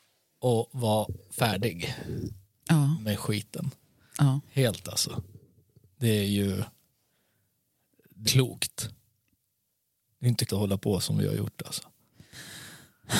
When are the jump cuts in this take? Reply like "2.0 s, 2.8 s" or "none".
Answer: 4.8 s, 8.3 s, 10.5 s, 11.0 s

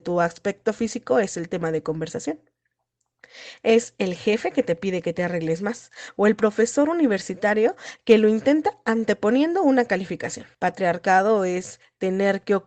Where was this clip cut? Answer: 10.5 s

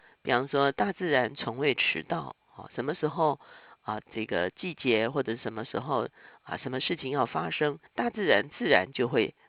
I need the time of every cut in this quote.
4.1 s, 7.9 s

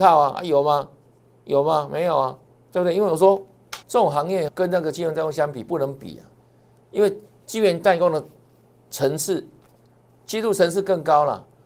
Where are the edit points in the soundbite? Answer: 2.5 s, 3.8 s, 4.5 s

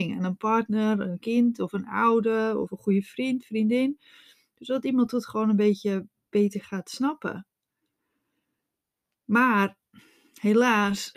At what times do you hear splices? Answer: none

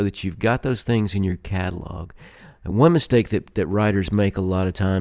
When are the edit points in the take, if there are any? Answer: none

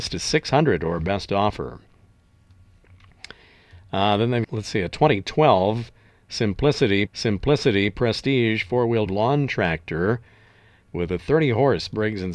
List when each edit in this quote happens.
4.4 s, 7.1 s, 9.1 s

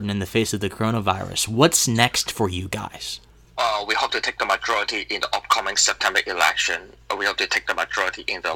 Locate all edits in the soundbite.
3.3 s

